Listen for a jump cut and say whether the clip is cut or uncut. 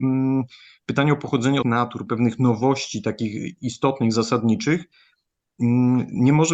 cut